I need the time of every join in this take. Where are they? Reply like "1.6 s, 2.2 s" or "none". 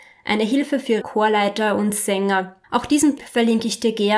1.0 s, 2.6 s, 3.2 s